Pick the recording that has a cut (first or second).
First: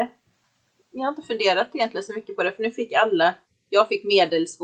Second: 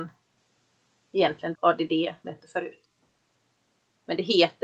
second